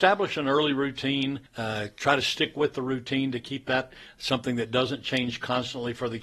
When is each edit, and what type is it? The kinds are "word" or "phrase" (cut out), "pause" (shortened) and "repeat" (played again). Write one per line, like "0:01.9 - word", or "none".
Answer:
0:01.5 - pause